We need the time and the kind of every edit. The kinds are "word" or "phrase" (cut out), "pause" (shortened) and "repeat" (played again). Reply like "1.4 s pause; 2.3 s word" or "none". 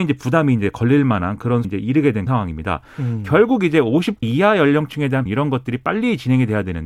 1.6 s word; 2.3 s word; 4.2 s word; 5.3 s phrase